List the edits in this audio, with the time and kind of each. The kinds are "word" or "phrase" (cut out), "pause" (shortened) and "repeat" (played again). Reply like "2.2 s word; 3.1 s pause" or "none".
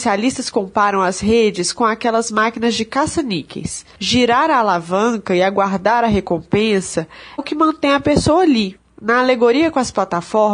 7.4 s word